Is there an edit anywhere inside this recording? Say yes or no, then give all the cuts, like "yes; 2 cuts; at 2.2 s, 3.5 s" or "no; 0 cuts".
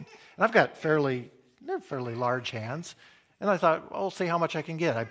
no; 0 cuts